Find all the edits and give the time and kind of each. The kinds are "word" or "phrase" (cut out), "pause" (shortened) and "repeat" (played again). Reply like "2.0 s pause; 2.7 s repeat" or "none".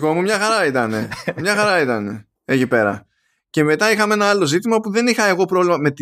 2.3 s pause